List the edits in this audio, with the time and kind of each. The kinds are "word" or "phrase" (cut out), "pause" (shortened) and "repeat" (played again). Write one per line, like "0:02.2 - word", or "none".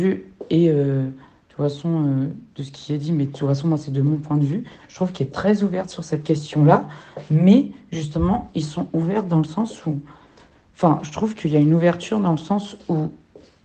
none